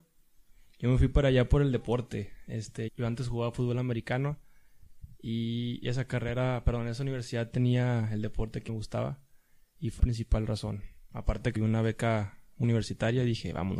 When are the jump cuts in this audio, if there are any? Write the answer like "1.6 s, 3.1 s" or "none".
2.9 s, 8.7 s, 10.0 s, 11.6 s, 12.6 s